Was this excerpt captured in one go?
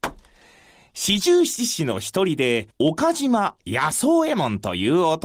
no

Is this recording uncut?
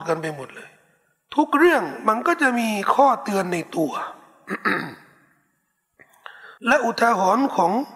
no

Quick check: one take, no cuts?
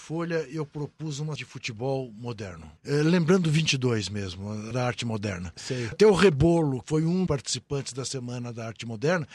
no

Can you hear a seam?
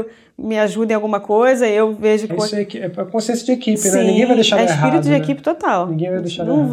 yes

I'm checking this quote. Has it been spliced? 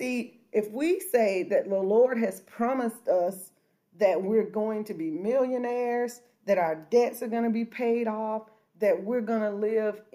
no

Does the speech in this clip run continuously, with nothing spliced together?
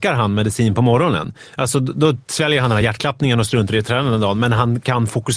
yes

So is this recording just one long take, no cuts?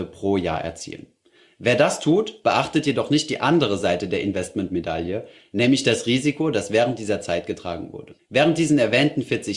no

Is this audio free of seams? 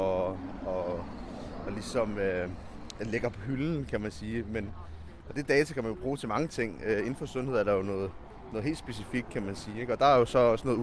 yes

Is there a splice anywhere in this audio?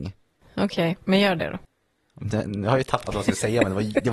no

